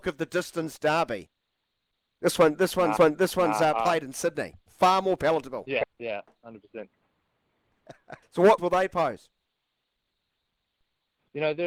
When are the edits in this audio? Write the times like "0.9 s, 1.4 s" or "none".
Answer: 3.0 s, 4.6 s, 5.9 s, 8.2 s, 8.6 s